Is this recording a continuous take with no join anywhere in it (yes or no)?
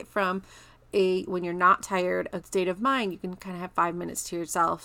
no